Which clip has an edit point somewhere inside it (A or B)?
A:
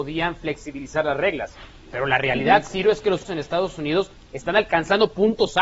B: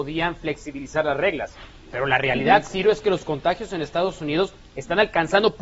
A